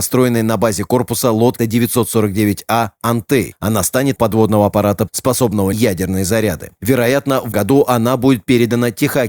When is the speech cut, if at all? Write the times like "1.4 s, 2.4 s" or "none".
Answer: 1.6 s, 4.2 s, 5.1 s, 5.7 s, 7.5 s